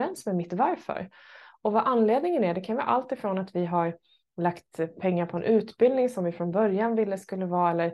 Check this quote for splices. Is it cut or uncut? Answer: uncut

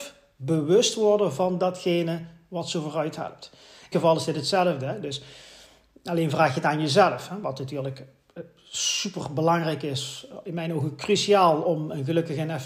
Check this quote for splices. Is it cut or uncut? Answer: cut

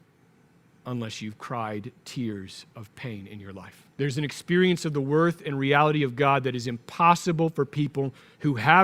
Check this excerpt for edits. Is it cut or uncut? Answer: cut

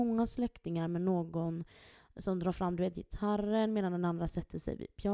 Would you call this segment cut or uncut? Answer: uncut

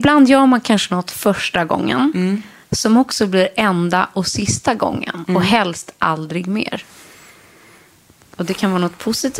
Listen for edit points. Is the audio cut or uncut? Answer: uncut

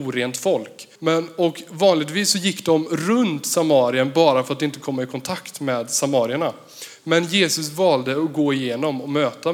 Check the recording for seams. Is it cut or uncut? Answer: cut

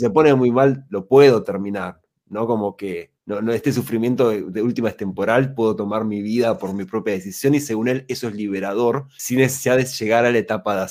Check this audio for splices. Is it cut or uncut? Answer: uncut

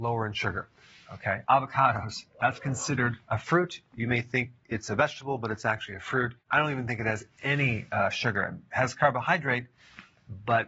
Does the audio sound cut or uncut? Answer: cut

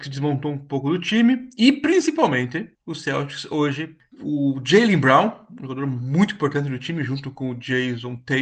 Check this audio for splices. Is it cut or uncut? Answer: cut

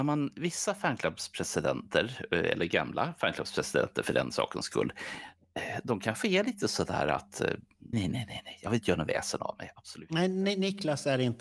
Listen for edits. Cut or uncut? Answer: cut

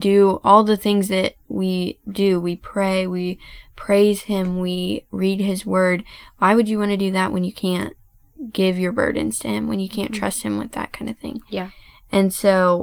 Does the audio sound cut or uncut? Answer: uncut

